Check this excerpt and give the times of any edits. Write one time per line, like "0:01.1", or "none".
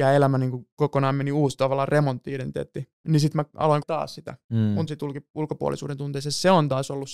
0:03.0
0:03.8
0:04.9